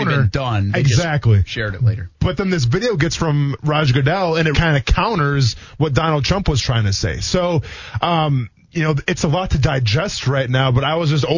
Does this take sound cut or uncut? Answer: cut